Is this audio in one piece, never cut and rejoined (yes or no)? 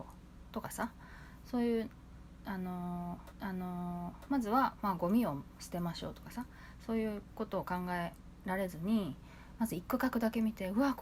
no